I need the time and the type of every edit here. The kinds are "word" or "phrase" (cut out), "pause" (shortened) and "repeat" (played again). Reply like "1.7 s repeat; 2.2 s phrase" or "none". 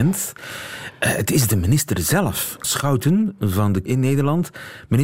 2.6 s word; 3.9 s word